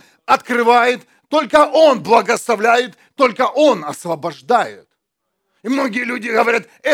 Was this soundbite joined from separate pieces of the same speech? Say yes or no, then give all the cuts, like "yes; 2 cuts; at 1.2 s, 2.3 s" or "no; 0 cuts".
no; 0 cuts